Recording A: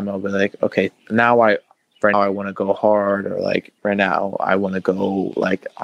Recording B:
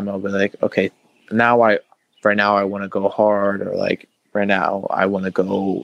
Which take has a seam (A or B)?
A